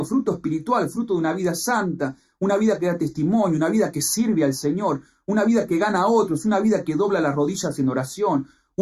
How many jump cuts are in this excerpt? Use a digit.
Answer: 0